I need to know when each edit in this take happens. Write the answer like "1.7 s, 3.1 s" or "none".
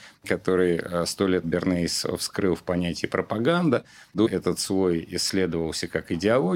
1.4 s, 4.3 s